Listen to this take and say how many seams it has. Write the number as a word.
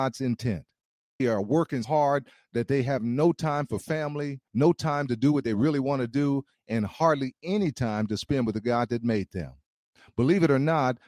three